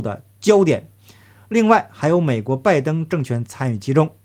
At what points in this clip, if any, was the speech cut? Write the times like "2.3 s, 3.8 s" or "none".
none